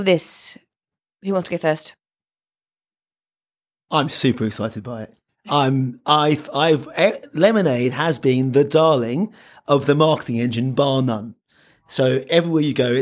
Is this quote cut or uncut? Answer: uncut